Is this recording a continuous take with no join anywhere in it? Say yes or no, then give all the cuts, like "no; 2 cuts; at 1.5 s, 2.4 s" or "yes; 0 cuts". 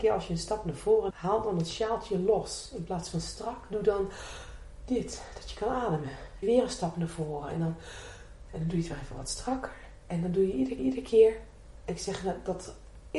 no; 3 cuts; at 1.1 s, 6.4 s, 10.8 s